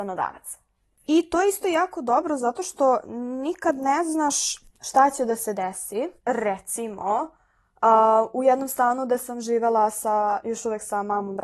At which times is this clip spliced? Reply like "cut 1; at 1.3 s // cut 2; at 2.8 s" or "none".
cut 1; at 4.7 s // cut 2; at 6.2 s